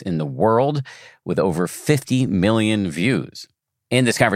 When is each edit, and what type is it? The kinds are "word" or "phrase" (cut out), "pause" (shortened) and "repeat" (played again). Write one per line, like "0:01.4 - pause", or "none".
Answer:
none